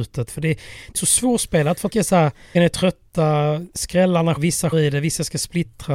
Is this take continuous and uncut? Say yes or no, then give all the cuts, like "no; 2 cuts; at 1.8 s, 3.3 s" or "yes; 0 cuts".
no; 5 cuts; at 1.0 s, 1.9 s, 2.5 s, 4.4 s, 4.7 s